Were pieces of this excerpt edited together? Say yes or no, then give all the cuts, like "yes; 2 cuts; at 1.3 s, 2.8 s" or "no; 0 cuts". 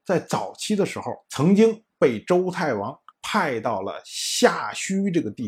yes; 2 cuts; at 1.2 s, 3.1 s